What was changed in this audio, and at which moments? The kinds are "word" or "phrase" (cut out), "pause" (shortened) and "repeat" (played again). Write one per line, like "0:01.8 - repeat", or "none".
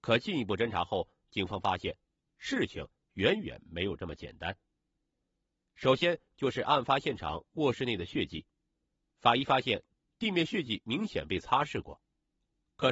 none